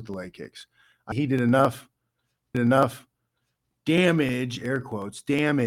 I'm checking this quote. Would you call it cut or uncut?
cut